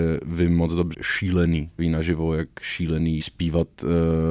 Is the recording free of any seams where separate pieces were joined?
no; 3 cuts; at 0.9 s, 1.8 s, 3.2 s

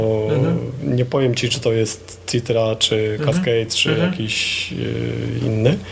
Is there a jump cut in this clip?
no; 0 cuts

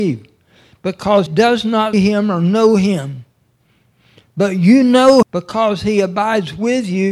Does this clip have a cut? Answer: yes; 3 cuts; at 1.3 s, 1.9 s, 5.2 s

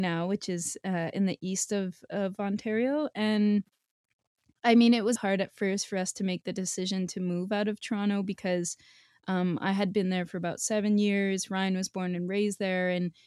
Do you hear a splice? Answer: yes; 1 cut; at 5.2 s

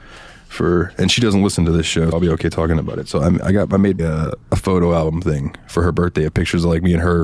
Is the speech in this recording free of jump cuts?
no; 3 cuts; at 2.1 s, 4.0 s, 4.4 s

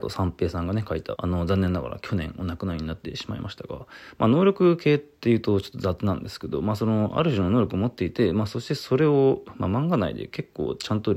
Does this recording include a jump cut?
yes; 1 cut; at 1.2 s

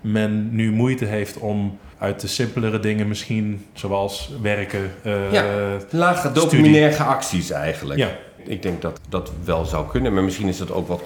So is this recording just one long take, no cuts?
no; 2 cuts; at 1.9 s, 9.0 s

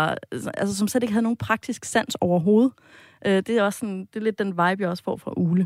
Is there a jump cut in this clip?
no; 0 cuts

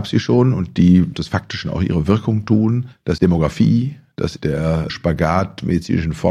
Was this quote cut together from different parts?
yes; 4 cuts; at 1.1 s, 3.2 s, 4.4 s, 4.9 s

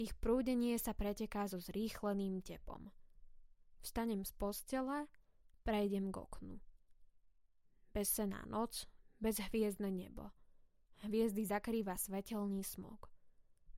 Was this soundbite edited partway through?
no; 0 cuts

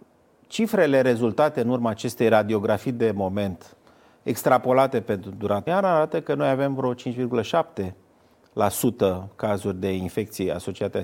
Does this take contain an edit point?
yes; 1 cut; at 5.7 s

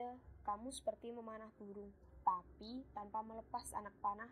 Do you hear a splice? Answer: no; 0 cuts

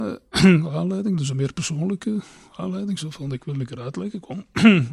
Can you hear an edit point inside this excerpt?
no; 0 cuts

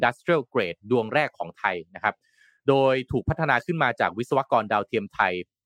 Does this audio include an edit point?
no; 0 cuts

